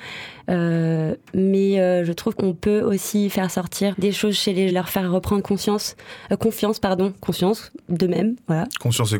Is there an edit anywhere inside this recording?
yes; 3 cuts; at 2.4 s, 3.9 s, 4.7 s

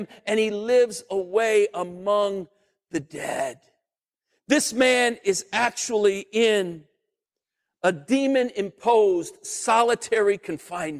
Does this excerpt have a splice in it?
no; 0 cuts

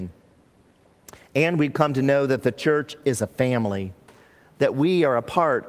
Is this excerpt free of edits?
yes; 0 cuts

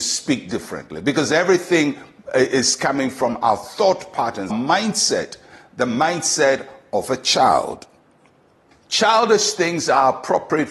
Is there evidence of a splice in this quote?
yes; 1 cut; at 4.5 s

